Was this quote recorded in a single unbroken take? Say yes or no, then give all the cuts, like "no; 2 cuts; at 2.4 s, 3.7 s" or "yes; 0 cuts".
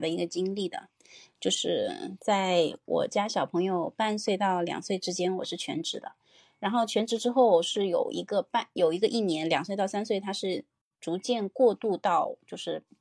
yes; 0 cuts